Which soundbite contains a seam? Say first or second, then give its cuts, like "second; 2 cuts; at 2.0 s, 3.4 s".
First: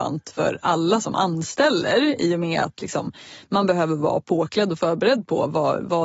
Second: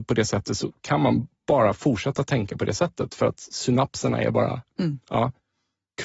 second; 1 cut; at 1.4 s